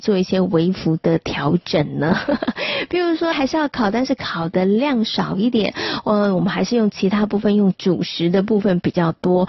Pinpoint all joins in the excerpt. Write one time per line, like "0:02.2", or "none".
0:03.3